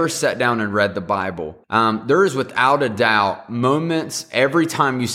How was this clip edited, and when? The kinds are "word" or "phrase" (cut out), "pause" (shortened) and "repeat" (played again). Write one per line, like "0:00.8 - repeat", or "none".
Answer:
0:01.6 - pause